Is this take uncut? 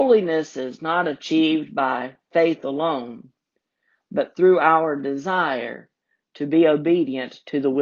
yes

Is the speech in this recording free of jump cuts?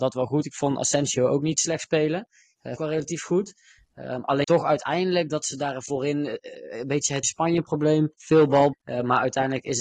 no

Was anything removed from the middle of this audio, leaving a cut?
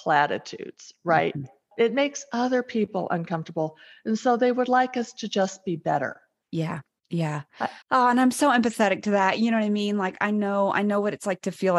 yes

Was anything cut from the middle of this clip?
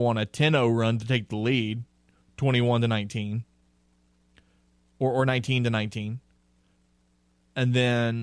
no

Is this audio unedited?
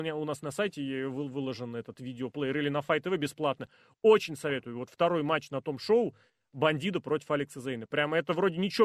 yes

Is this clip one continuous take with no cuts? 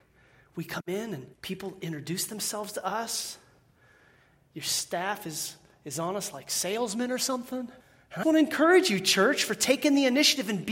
no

